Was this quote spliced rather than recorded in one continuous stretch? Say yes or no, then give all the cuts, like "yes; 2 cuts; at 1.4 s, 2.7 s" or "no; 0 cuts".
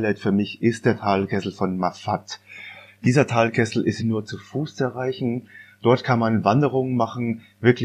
yes; 1 cut; at 4.0 s